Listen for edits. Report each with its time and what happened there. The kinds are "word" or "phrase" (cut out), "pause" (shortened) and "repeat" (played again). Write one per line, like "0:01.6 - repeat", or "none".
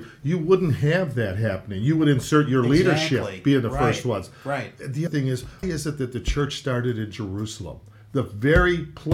0:05.1 - word
0:05.6 - word

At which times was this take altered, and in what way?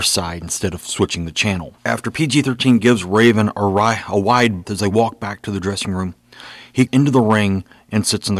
0:01.8 - pause
0:04.6 - word
0:06.9 - word

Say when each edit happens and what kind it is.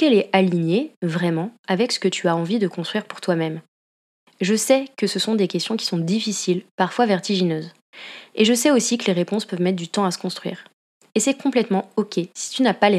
none

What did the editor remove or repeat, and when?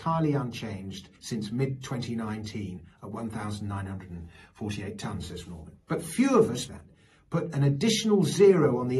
0:01.1 - pause
0:05.4 - word
0:05.8 - pause
0:06.7 - word

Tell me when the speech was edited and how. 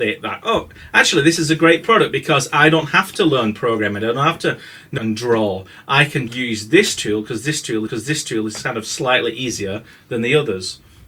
0:05.0 - phrase
0:06.3 - word
0:07.9 - repeat

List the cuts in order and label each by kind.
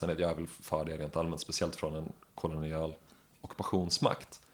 none

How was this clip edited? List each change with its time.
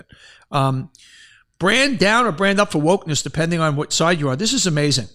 none

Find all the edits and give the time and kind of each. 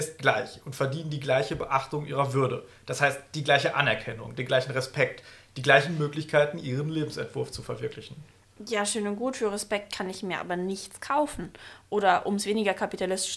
none

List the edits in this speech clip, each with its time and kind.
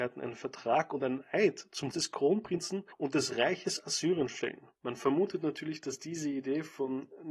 0:01.9 - word
0:02.9 - pause
0:04.7 - pause

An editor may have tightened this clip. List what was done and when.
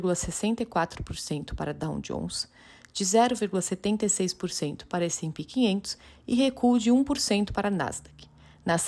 none

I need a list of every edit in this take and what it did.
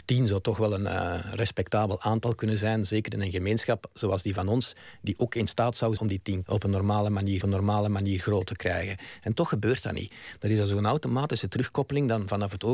0:06.0 - word
0:06.4 - word
0:07.4 - repeat

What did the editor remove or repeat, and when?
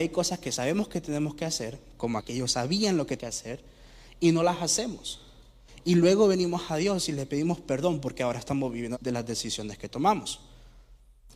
0:02.2 - word
0:03.2 - word
0:08.9 - phrase

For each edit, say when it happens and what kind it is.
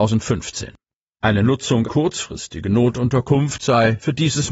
0:01.8 - word

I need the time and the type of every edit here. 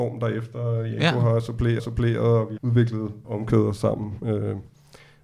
0:01.8 - repeat
0:02.6 - word
0:03.2 - word
0:03.8 - word

